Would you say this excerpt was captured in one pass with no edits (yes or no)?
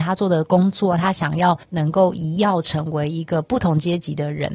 no